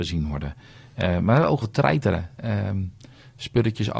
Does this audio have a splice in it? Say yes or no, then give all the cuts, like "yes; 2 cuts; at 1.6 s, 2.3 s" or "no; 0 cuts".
yes; 1 cut; at 1.6 s